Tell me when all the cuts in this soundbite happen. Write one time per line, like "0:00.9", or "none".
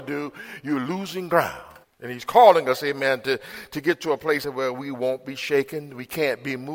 0:01.8
0:04.4